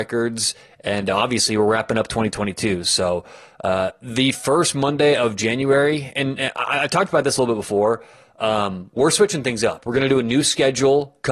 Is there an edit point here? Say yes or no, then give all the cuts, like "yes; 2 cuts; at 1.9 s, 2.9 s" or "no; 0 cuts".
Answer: no; 0 cuts